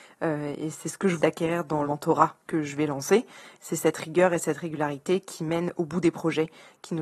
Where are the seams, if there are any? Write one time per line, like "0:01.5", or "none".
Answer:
0:01.2
0:01.8
0:02.4